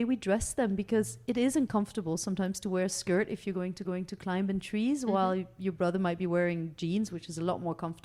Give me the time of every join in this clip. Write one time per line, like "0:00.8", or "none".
0:03.8